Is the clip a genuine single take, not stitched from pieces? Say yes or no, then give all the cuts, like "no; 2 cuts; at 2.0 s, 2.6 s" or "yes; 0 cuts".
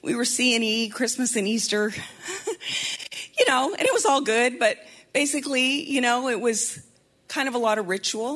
yes; 0 cuts